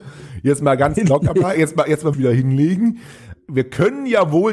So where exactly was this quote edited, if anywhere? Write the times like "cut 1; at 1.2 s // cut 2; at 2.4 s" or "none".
cut 1; at 1.6 s // cut 2; at 2.1 s